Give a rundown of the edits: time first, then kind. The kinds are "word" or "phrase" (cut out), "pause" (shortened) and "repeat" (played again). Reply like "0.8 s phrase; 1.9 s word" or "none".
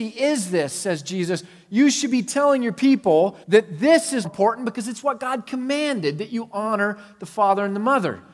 3.4 s pause; 4.2 s word